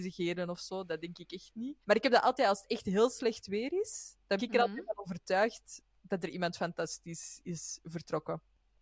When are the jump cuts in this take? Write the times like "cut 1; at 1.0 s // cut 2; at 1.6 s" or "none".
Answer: cut 1; at 1.8 s // cut 2; at 4.4 s